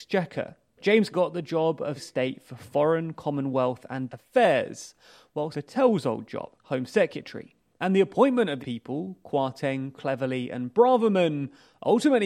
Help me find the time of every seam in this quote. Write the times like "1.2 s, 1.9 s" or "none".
1.1 s, 2.0 s, 4.1 s, 5.5 s, 6.6 s, 8.6 s